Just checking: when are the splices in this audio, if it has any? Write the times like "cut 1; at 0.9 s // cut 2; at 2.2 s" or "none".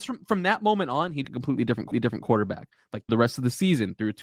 cut 1; at 1.2 s // cut 2; at 1.9 s // cut 3; at 3.1 s